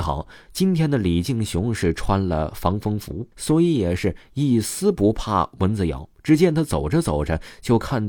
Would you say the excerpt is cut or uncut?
cut